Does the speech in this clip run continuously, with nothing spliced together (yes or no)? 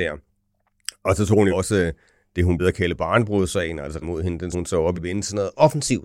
no